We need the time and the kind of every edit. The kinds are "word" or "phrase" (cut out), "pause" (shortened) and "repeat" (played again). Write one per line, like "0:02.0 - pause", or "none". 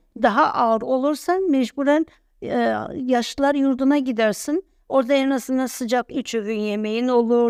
none